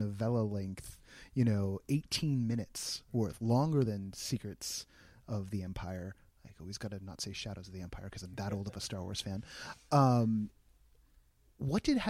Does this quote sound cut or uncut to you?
uncut